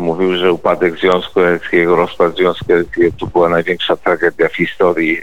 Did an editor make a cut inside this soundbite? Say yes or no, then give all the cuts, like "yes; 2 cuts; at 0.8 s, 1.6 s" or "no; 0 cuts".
no; 0 cuts